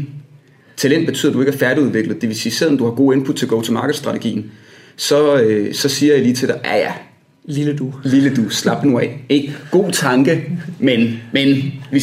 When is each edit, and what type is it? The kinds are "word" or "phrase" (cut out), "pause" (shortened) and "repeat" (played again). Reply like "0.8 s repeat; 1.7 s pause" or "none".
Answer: none